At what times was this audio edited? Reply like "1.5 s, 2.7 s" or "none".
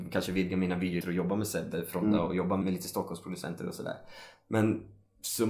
1.0 s, 2.6 s